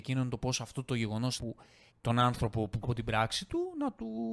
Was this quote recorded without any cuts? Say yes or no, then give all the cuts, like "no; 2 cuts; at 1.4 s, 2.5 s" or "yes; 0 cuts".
no; 3 cuts; at 1.4 s, 1.9 s, 2.8 s